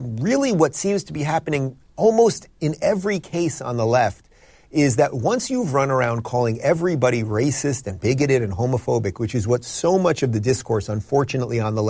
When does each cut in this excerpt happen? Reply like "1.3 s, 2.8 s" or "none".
none